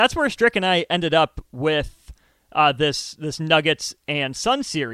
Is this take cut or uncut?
uncut